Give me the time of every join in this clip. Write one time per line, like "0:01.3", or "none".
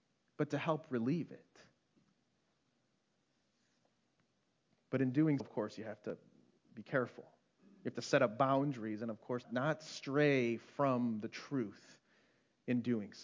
0:05.4
0:07.5
0:09.4